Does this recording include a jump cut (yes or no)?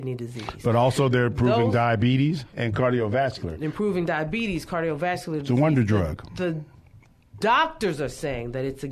no